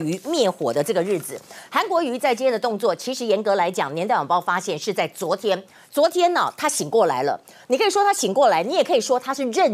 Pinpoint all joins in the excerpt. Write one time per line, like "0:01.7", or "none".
none